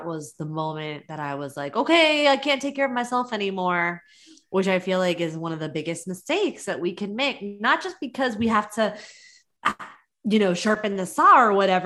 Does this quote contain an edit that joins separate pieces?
no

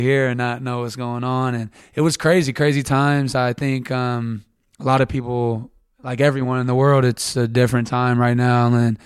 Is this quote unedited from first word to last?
no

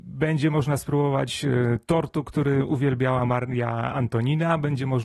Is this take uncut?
yes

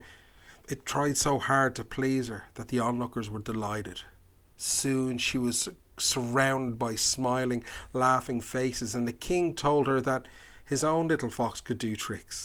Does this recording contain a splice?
no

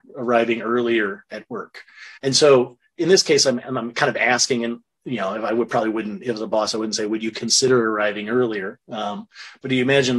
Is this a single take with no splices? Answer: no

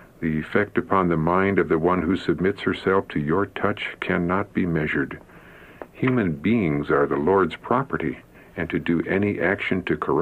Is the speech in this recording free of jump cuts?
no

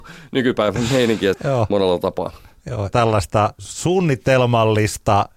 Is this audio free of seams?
no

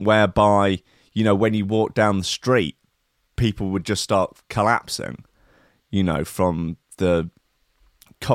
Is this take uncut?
yes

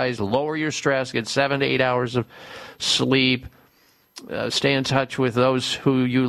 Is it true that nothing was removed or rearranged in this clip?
yes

